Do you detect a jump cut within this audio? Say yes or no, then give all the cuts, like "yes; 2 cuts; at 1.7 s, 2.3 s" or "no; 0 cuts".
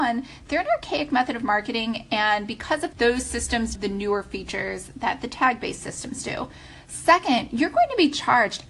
yes; 2 cuts; at 2.9 s, 3.7 s